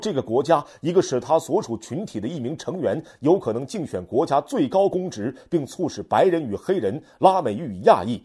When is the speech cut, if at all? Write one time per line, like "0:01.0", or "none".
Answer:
none